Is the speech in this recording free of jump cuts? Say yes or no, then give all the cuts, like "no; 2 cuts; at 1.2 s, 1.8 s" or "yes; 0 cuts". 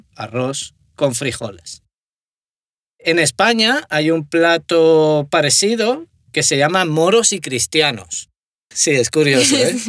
yes; 0 cuts